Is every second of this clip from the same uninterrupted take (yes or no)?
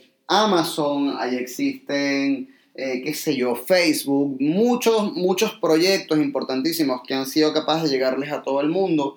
yes